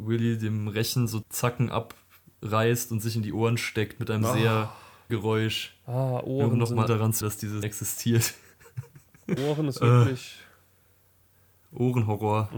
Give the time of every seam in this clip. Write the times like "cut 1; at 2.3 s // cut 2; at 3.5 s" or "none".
cut 1; at 1.2 s // cut 2; at 5.1 s // cut 3; at 6.9 s // cut 4; at 7.2 s // cut 5; at 7.6 s // cut 6; at 9.4 s